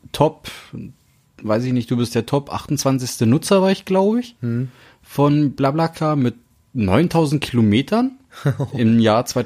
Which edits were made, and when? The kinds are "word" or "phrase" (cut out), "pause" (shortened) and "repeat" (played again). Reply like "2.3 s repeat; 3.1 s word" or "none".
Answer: none